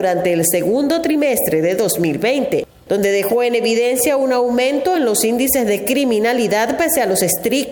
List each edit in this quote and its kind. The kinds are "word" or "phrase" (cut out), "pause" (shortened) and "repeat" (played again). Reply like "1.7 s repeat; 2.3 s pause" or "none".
none